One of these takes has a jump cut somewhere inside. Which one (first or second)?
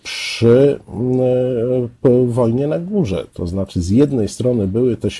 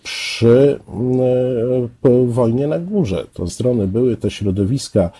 second